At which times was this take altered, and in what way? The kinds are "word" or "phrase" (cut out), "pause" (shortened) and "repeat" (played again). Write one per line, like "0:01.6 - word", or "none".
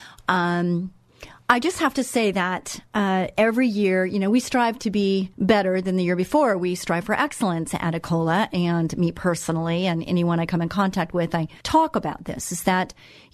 0:05.3 - pause
0:11.6 - pause